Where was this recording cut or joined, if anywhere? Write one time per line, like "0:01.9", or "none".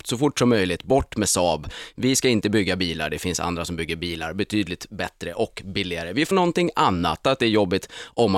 0:06.3
0:07.2